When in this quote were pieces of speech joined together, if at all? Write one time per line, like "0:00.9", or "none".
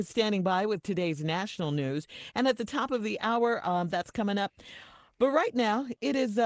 none